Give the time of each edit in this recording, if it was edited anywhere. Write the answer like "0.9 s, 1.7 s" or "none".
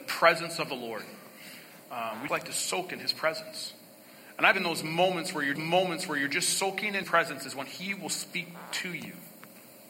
2.3 s, 4.5 s, 5.6 s, 7.0 s